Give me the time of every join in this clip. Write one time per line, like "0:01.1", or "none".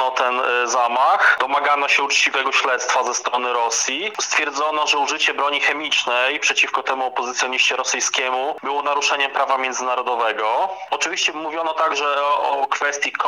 none